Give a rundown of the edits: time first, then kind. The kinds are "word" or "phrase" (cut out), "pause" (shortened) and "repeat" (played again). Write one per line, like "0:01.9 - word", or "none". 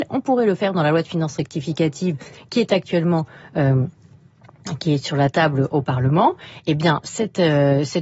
none